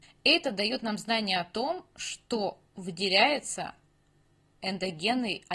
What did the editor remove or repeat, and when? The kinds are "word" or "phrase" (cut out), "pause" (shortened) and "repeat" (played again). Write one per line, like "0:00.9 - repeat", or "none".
0:02.7 - pause